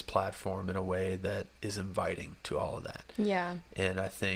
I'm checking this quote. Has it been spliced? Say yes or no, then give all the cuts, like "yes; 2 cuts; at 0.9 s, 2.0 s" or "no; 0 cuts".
yes; 2 cuts; at 1.6 s, 2.4 s